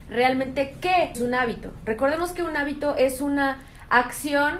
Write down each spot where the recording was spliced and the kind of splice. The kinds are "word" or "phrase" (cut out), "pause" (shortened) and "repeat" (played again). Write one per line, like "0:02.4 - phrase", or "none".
0:01.1 - word